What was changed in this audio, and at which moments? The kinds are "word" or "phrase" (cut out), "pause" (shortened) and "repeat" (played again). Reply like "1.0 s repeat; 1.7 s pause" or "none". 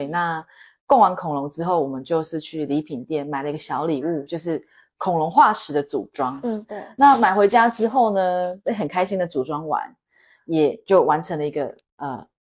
4.3 s phrase